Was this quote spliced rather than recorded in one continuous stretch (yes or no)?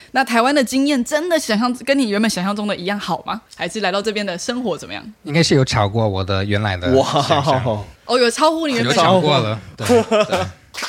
yes